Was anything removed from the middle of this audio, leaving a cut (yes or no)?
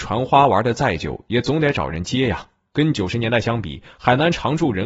no